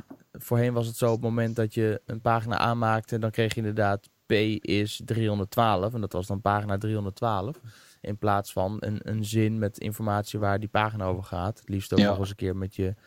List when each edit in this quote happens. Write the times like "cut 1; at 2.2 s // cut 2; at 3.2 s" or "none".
none